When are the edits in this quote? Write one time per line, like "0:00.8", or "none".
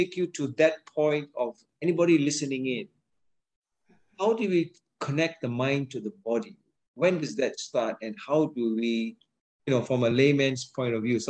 none